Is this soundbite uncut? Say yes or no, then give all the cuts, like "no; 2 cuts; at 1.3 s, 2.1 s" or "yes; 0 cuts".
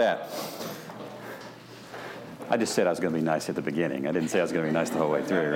yes; 0 cuts